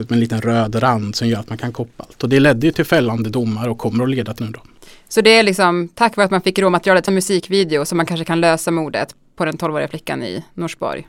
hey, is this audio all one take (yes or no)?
no